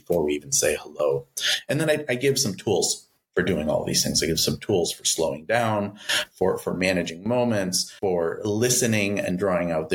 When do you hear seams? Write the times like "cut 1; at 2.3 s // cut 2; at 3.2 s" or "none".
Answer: cut 1; at 8.0 s